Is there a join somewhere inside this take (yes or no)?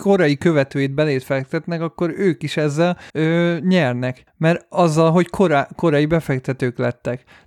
yes